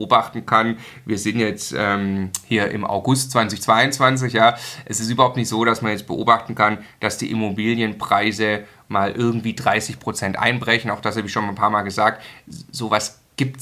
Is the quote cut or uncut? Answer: uncut